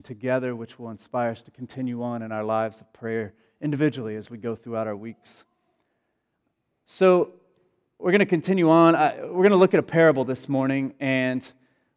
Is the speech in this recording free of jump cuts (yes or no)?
yes